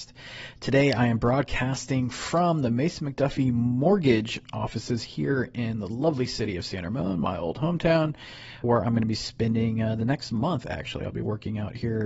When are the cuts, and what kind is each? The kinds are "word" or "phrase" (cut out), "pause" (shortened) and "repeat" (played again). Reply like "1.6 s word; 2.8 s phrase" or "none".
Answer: 8.6 s word